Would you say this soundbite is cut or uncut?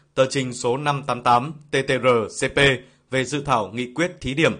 uncut